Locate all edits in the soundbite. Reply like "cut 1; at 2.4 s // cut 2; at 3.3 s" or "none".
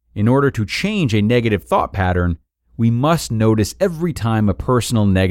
none